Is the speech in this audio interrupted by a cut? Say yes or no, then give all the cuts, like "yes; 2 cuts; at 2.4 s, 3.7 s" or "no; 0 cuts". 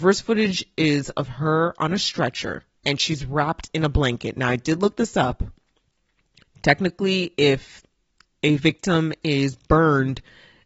yes; 1 cut; at 2.8 s